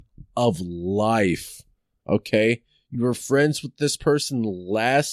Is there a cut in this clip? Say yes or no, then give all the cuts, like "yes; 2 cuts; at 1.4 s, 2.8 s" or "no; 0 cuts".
no; 0 cuts